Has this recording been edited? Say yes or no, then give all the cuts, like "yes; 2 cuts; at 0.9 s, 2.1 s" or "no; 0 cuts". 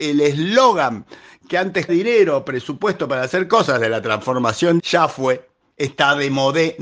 yes; 2 cuts; at 1.9 s, 4.8 s